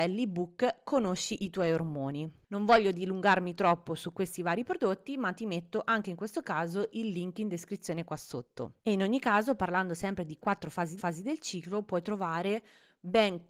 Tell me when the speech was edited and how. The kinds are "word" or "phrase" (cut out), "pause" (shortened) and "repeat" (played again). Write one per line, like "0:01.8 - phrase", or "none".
0:08.8 - pause
0:11.0 - repeat